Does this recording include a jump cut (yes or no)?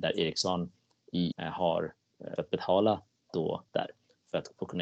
yes